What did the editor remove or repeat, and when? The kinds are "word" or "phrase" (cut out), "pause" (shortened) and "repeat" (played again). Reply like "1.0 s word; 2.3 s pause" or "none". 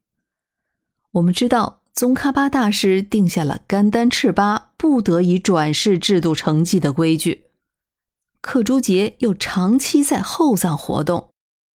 none

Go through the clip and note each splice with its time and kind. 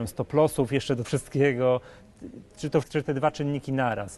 1.0 s word; 2.8 s phrase

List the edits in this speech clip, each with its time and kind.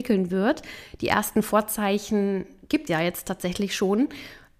2.9 s word

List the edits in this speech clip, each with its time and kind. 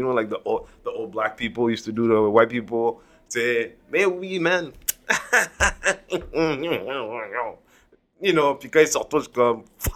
none

